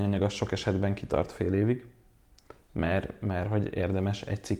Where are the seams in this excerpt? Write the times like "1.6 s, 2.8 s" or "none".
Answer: none